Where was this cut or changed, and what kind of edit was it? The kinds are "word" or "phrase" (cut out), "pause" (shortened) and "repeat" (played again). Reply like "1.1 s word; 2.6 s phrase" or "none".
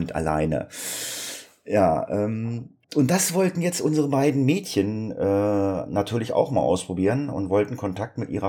2.8 s pause